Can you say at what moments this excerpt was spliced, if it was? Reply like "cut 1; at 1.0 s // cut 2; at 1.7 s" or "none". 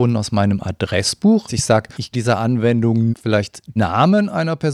cut 1; at 1.5 s // cut 2; at 2.1 s // cut 3; at 3.1 s // cut 4; at 3.8 s